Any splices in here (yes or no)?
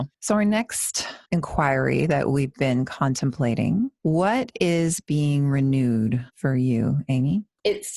yes